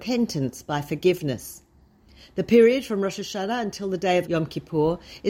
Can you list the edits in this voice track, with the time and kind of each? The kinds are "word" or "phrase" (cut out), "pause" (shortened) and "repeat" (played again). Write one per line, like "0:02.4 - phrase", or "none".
0:04.2 - word